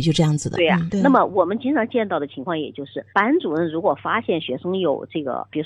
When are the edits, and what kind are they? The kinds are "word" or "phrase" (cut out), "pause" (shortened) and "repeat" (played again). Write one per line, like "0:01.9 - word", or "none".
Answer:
0:03.1 - pause